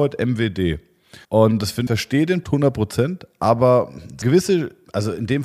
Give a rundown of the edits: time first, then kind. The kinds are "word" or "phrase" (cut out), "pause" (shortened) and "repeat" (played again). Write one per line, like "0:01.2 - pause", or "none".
0:01.2 - pause
0:01.9 - phrase
0:02.4 - word
0:04.2 - word